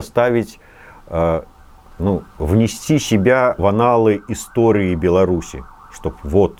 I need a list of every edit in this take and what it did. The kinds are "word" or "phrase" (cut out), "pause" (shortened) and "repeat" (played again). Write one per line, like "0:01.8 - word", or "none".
0:03.6 - word